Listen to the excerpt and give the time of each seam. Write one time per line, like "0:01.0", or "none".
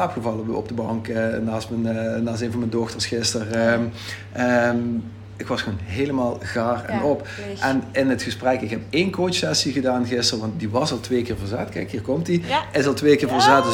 none